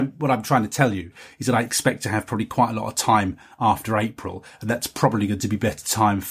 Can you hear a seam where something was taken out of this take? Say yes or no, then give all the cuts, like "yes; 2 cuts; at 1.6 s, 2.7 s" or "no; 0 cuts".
no; 0 cuts